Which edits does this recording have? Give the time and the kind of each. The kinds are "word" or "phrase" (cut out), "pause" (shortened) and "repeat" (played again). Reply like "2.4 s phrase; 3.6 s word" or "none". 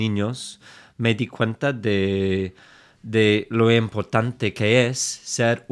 none